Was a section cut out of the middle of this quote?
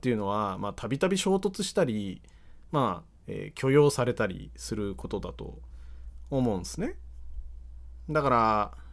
yes; 1 cut; at 3.2 s

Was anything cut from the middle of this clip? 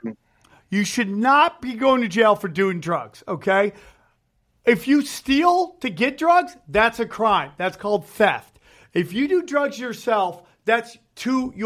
no; 0 cuts

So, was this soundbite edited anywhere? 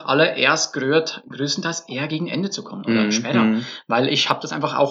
no; 0 cuts

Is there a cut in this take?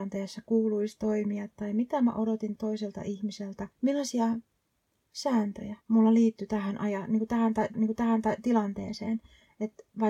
yes; 4 cuts; at 2.6 s, 3.7 s, 5.8 s, 7.7 s

